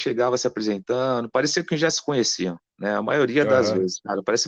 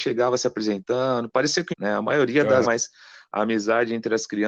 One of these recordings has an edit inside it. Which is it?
second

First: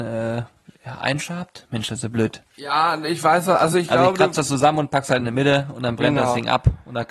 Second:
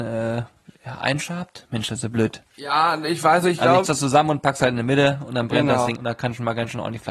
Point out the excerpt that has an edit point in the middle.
second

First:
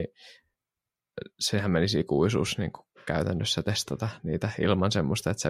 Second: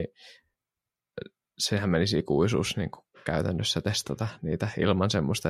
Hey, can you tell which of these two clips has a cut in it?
first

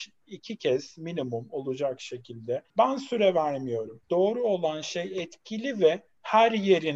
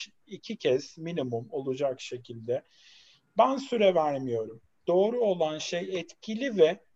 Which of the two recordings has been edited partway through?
first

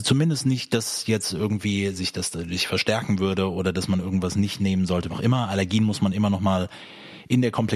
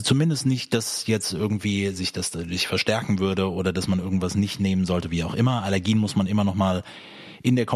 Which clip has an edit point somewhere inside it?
first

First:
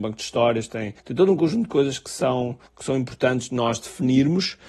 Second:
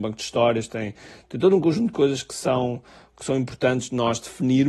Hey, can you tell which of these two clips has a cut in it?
first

